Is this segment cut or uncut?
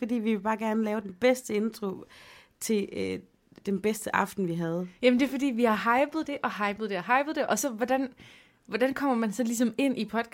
uncut